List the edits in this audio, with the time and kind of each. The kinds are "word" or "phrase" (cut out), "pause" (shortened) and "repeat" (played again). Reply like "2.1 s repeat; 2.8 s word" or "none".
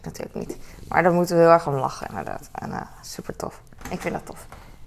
none